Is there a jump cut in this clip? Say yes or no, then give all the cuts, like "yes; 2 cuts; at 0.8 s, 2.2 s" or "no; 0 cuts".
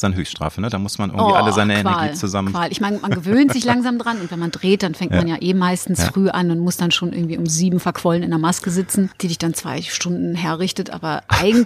no; 0 cuts